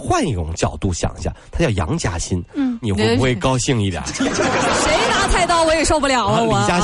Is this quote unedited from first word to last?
no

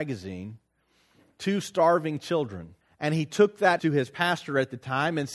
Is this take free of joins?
no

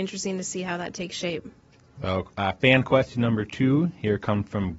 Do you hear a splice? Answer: no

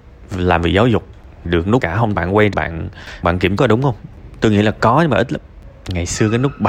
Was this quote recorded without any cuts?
no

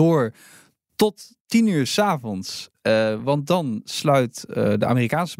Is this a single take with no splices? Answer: yes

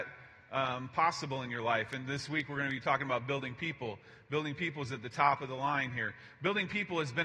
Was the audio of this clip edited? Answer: no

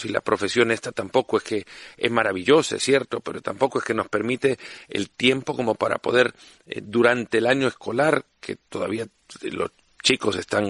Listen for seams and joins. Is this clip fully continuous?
yes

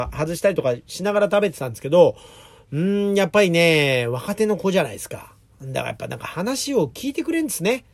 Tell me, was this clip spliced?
no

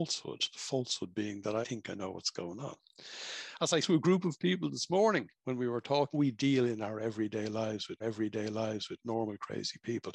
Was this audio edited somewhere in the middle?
yes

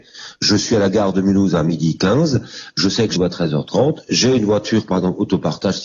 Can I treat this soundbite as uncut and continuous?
no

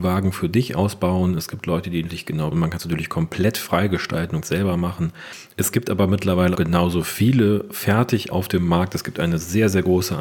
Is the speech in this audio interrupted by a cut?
yes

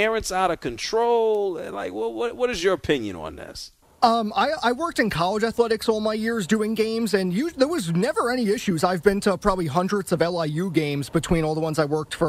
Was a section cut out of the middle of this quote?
yes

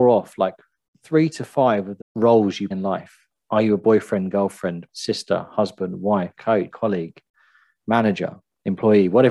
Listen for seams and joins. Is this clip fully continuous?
no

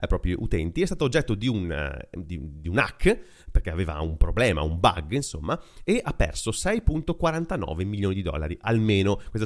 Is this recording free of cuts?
yes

